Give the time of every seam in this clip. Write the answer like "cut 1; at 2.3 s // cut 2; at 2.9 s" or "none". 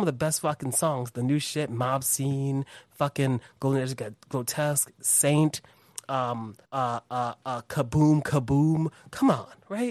cut 1; at 6.6 s